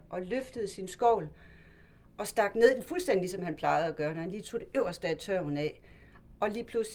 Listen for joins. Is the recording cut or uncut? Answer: uncut